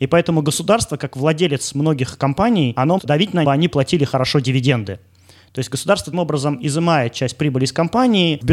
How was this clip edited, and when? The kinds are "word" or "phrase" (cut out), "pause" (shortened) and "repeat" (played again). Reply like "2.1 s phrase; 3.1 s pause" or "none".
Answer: 3.0 s word; 3.4 s phrase; 6.1 s word